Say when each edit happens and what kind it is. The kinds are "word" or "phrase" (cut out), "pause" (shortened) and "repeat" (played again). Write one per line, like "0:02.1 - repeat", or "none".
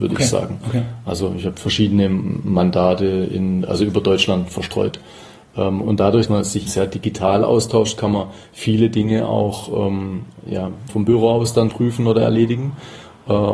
0:05.8 - word
0:06.3 - word
0:06.7 - word
0:10.9 - word
0:11.7 - word